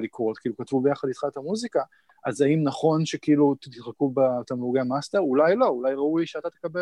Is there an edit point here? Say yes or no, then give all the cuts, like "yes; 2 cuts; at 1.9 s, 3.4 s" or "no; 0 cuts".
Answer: no; 0 cuts